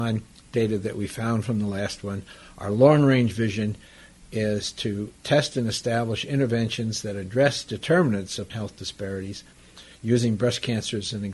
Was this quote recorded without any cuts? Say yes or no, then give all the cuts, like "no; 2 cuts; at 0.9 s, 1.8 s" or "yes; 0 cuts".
no; 1 cut; at 8.5 s